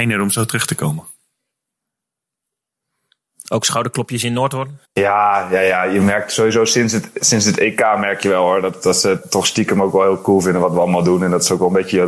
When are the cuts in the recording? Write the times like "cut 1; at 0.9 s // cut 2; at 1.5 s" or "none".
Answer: cut 1; at 4.8 s // cut 2; at 9.2 s